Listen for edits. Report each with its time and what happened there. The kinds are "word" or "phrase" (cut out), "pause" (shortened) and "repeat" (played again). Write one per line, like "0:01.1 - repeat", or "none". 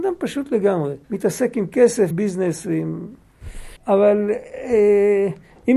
0:01.0 - pause
0:02.1 - phrase
0:03.8 - pause